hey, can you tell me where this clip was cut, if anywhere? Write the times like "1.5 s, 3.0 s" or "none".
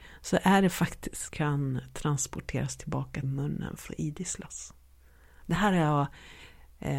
1.3 s, 3.2 s, 3.9 s